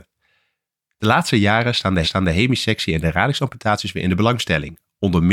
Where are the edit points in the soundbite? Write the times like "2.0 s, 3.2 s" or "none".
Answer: 2.0 s